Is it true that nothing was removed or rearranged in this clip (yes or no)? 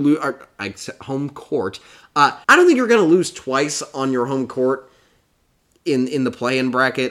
no